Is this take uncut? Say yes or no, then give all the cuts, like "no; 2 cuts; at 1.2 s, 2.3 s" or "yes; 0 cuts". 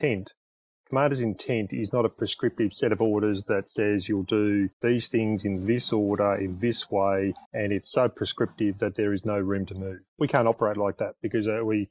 no; 3 cuts; at 4.7 s, 7.4 s, 10.1 s